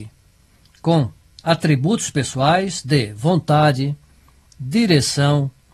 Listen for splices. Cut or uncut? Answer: uncut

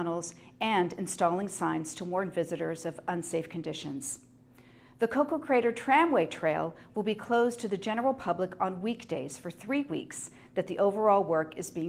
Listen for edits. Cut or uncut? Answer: uncut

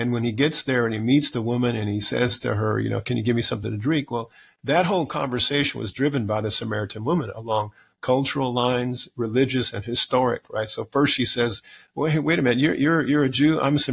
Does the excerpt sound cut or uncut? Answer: uncut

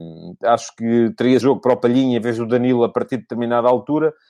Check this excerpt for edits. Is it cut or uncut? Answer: cut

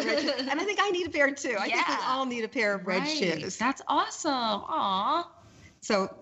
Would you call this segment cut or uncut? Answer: uncut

